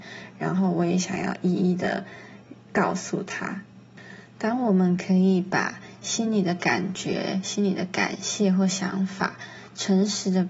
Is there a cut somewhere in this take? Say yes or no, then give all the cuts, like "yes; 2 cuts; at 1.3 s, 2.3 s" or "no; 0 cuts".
yes; 1 cut; at 2.6 s